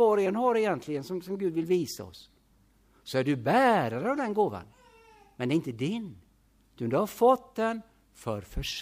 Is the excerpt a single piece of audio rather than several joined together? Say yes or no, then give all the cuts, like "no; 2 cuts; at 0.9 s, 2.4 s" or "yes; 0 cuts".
yes; 0 cuts